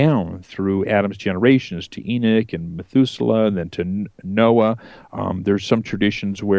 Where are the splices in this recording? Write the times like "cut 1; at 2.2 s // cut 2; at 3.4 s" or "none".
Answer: none